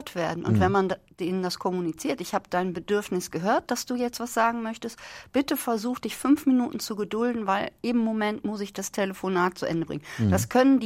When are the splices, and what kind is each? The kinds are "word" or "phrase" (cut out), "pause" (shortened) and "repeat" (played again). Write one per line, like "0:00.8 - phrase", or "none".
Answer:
none